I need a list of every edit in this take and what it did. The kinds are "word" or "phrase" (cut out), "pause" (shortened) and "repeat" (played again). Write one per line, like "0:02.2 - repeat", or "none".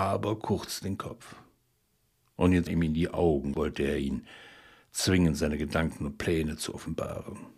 0:02.7 - word
0:03.5 - word

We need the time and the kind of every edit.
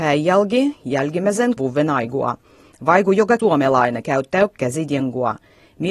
0:01.6 - word
0:03.4 - word

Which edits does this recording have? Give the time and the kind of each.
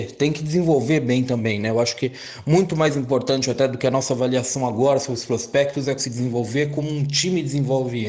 0:06.0 - phrase

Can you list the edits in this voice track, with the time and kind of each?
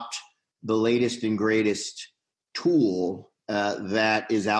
0:03.4 - pause

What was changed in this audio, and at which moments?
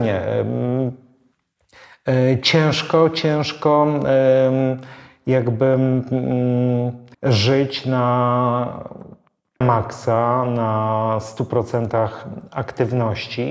0:07.1 - pause
0:09.6 - word

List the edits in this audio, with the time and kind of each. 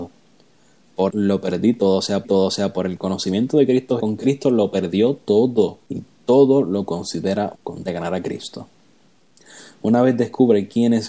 0:01.1 - word
0:02.2 - repeat
0:04.0 - phrase
0:05.8 - pause
0:07.5 - word
0:07.8 - word

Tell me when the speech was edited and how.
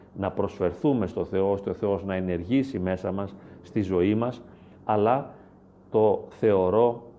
none

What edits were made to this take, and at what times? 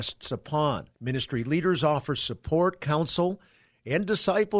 0:00.9 - pause

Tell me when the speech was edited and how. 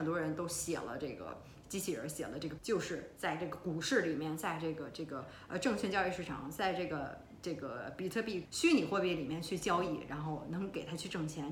0:02.6 - word
0:08.4 - word

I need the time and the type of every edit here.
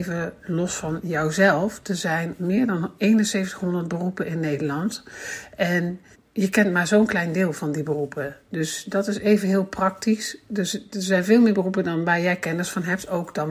0:06.1 - pause

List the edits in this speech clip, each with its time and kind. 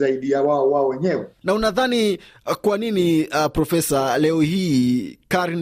none

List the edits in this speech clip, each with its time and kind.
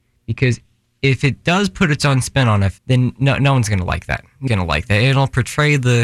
0:02.8 - pause
0:04.5 - word

